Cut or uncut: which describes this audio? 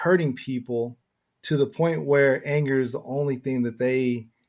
uncut